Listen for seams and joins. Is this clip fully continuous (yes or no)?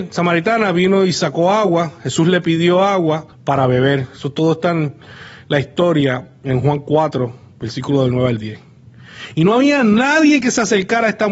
no